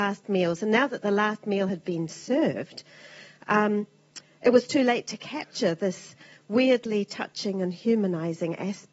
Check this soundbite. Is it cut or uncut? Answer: uncut